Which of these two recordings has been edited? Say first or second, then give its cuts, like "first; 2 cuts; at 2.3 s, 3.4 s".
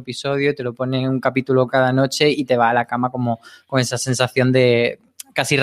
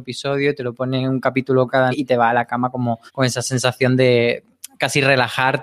second; 2 cuts; at 1.9 s, 3.1 s